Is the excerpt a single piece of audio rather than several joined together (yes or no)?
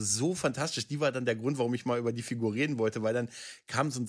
yes